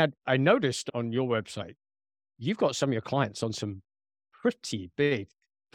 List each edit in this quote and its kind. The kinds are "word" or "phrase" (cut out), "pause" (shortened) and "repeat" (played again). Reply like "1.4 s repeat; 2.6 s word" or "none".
none